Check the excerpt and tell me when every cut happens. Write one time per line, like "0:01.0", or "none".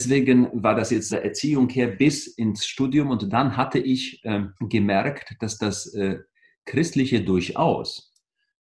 0:01.1
0:04.6
0:06.3